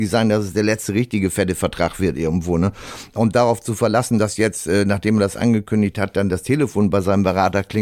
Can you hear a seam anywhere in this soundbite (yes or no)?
no